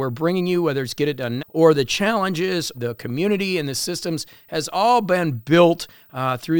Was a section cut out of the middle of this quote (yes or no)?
yes